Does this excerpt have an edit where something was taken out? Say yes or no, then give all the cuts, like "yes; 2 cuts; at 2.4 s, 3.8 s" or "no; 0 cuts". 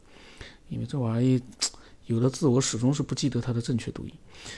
no; 0 cuts